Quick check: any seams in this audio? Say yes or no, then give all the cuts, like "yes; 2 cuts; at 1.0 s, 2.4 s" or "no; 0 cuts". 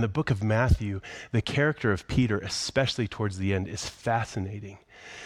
no; 0 cuts